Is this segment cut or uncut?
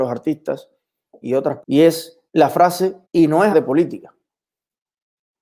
cut